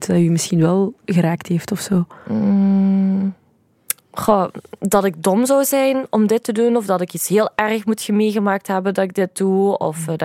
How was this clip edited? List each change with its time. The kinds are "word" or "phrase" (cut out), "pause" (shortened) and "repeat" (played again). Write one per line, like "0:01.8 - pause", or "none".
none